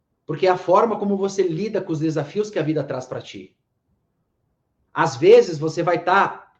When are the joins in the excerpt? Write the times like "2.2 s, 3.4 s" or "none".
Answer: none